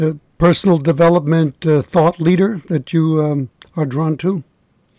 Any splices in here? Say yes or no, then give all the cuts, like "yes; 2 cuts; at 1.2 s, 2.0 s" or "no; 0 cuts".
yes; 1 cut; at 3.6 s